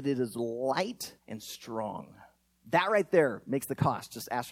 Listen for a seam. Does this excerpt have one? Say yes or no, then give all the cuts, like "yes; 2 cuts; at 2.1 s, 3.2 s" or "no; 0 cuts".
yes; 1 cut; at 1.2 s